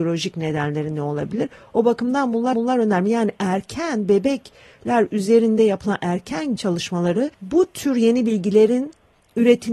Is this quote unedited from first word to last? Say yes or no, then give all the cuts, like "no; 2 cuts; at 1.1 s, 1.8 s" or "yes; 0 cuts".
no; 3 cuts; at 2.5 s, 6.6 s, 7.3 s